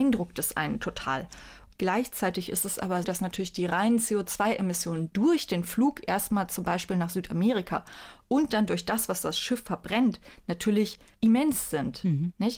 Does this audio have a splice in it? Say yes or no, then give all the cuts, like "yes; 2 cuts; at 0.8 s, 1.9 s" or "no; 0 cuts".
yes; 1 cut; at 3.0 s